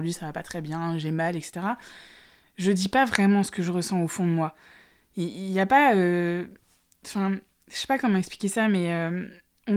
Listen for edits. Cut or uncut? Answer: uncut